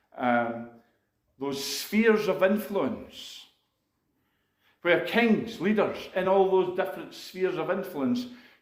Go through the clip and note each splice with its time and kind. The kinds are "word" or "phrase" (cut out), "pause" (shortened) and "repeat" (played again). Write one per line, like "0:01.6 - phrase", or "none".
none